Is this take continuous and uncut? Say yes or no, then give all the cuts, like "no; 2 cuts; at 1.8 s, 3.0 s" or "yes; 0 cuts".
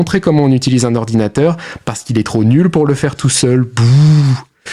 yes; 0 cuts